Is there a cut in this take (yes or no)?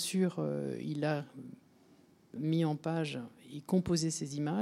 yes